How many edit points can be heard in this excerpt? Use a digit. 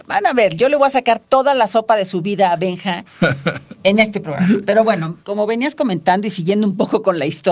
1